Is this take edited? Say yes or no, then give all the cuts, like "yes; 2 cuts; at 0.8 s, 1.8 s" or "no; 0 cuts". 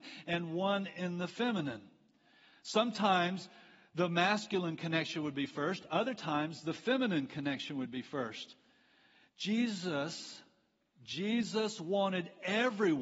no; 0 cuts